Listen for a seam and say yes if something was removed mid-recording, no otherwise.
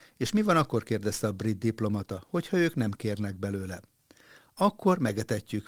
no